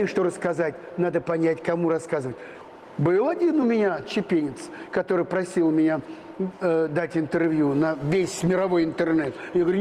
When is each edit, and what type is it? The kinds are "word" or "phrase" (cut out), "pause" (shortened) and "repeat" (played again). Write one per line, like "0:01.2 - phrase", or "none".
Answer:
none